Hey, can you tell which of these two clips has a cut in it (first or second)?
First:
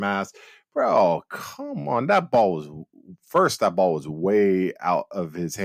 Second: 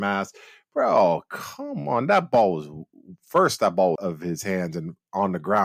second